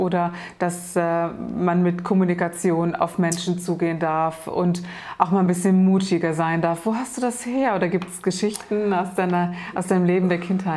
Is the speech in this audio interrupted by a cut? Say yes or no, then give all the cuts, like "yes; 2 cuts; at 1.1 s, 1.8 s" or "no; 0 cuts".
no; 0 cuts